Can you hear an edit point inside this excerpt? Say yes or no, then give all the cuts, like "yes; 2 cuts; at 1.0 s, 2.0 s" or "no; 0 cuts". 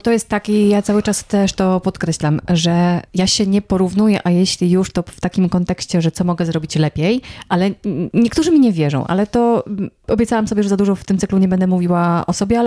no; 0 cuts